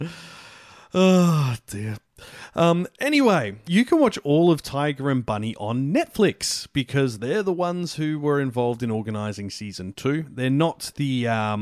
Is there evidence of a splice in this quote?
yes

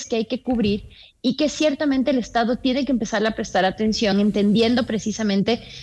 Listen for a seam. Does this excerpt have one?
no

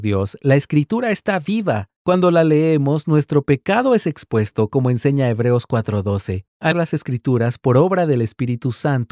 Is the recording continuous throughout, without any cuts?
no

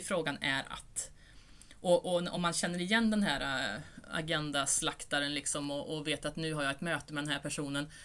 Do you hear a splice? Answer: no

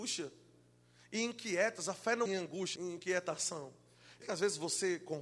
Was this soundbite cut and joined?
yes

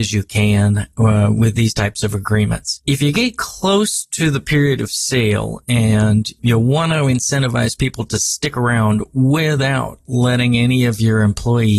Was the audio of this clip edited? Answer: no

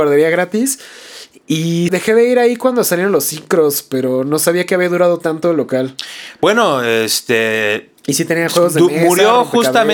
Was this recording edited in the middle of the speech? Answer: yes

